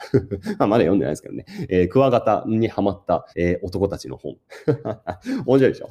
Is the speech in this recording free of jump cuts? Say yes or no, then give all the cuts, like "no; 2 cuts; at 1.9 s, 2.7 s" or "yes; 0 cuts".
no; 1 cut; at 3.3 s